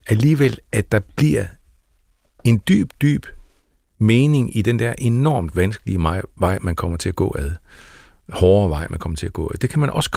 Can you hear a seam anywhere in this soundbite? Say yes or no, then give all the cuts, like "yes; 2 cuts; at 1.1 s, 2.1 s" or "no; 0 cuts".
no; 0 cuts